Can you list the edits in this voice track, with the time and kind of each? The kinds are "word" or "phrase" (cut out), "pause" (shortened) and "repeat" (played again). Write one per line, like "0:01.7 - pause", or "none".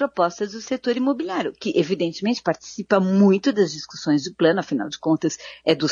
none